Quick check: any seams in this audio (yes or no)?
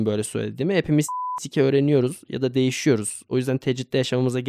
no